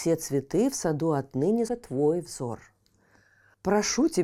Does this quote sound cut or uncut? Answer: cut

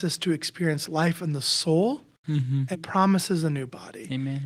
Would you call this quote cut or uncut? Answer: cut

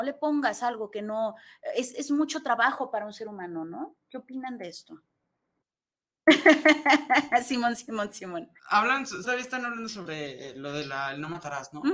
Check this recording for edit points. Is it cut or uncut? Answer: cut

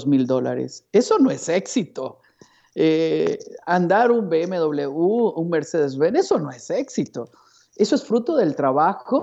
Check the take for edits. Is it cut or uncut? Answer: uncut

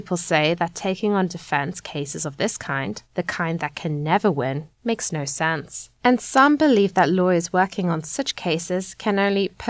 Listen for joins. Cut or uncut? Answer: cut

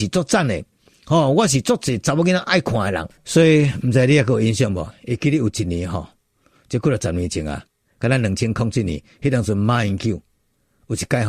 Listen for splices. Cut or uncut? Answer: cut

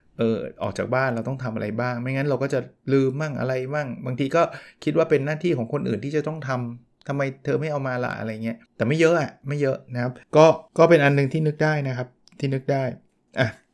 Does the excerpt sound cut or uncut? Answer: cut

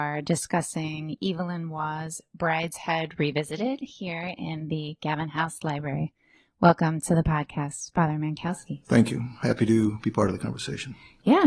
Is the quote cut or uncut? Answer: uncut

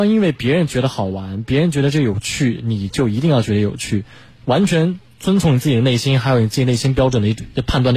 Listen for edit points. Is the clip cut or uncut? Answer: uncut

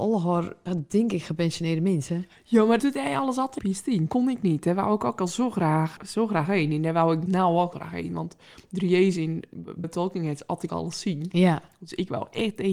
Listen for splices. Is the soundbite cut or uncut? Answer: cut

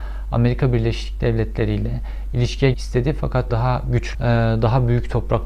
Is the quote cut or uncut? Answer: cut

